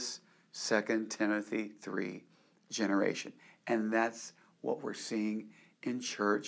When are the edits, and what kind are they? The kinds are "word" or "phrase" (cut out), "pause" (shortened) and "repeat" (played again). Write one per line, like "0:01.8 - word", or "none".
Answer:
none

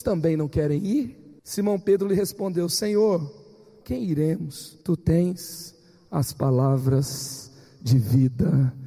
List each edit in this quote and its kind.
0:01.4 - pause
0:03.8 - word
0:04.8 - pause

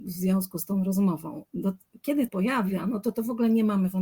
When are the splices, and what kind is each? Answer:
0:02.3 - phrase

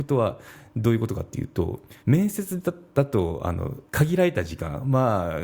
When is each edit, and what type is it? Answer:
0:02.0 - pause
0:03.9 - pause

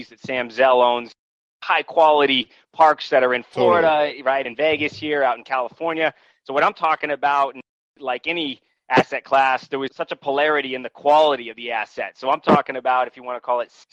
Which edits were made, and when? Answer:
none

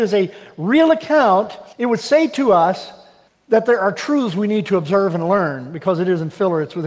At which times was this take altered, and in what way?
0:01.7 - pause
0:03.3 - pause

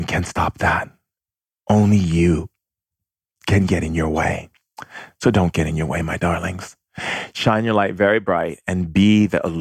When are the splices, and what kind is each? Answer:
none

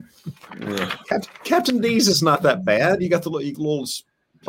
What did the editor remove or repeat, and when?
0:03.5 - word

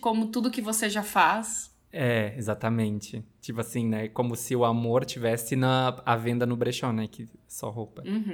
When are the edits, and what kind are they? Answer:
none

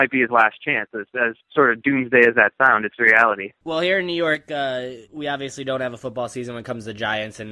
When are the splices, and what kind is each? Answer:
0:01.4 - pause
0:05.0 - pause

